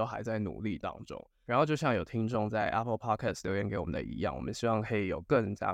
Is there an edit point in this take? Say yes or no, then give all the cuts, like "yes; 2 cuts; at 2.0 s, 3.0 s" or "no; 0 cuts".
no; 0 cuts